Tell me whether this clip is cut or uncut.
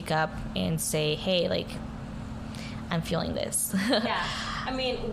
uncut